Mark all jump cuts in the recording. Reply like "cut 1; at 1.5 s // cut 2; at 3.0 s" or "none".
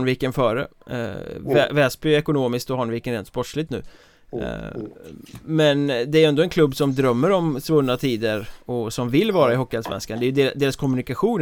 cut 1; at 3.7 s // cut 2; at 8.6 s